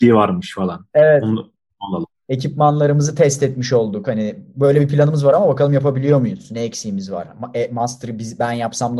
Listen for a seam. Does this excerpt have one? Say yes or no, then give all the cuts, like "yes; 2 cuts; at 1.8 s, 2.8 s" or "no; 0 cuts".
no; 0 cuts